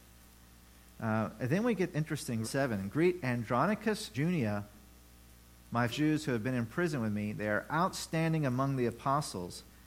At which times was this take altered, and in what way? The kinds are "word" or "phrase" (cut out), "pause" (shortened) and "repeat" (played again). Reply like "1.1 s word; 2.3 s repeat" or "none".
1.9 s word; 2.4 s word; 4.1 s word; 5.9 s word